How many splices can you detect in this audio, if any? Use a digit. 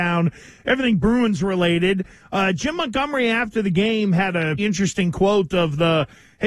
1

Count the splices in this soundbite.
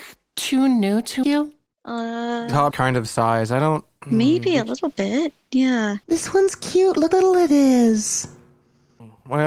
5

